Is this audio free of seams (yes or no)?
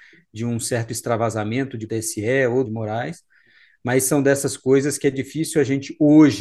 no